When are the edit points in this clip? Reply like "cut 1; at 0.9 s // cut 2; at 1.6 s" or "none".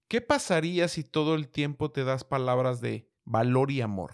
cut 1; at 3.2 s